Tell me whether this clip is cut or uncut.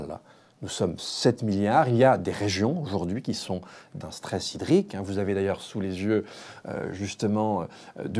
cut